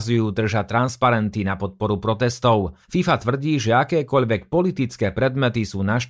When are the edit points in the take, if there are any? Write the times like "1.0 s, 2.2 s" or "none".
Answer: 2.8 s